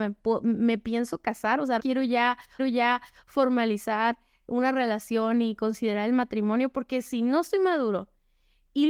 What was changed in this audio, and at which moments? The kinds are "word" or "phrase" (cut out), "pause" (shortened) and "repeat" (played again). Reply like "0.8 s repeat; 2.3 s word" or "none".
1.8 s word; 2.6 s repeat